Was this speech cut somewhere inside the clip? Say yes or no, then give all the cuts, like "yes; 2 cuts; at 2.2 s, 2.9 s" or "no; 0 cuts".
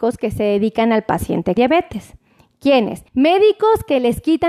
yes; 2 cuts; at 1.6 s, 3.1 s